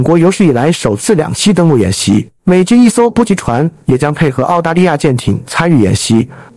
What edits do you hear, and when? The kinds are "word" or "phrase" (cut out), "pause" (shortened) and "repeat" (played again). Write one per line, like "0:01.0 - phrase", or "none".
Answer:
0:02.4 - pause

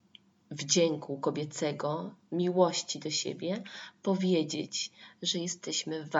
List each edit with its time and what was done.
none

